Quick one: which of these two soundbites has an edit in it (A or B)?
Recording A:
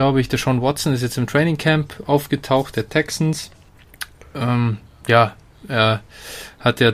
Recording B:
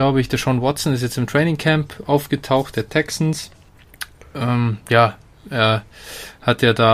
B